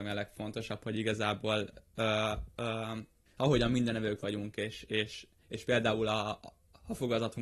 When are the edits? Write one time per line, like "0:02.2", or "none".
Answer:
0:03.3